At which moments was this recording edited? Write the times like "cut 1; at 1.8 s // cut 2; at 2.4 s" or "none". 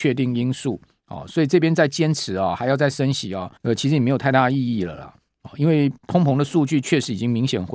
cut 1; at 3.6 s // cut 2; at 6.0 s